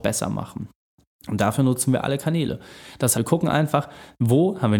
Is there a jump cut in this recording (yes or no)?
yes